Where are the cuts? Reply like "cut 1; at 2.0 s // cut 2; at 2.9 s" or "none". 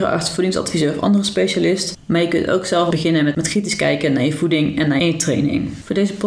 cut 1; at 2.9 s // cut 2; at 5.0 s